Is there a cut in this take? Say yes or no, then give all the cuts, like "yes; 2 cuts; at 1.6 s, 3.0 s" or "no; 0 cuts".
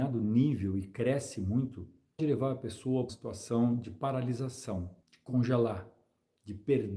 yes; 3 cuts; at 2.2 s, 3.1 s, 5.0 s